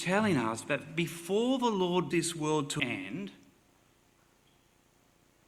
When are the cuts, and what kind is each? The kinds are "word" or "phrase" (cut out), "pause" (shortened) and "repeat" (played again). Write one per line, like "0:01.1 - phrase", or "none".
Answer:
0:02.1 - word
0:02.8 - word